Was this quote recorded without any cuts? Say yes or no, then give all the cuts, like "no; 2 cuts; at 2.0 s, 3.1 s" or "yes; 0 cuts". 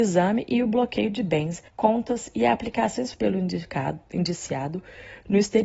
no; 2 cuts; at 1.7 s, 3.1 s